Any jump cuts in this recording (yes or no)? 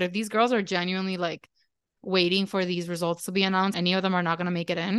yes